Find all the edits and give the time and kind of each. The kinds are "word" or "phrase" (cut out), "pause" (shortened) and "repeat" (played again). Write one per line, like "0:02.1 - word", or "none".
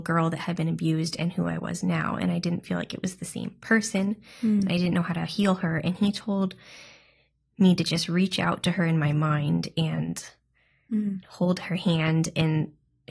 none